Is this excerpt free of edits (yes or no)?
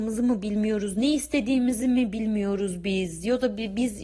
yes